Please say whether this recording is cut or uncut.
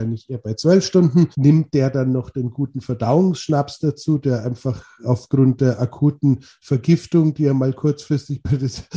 cut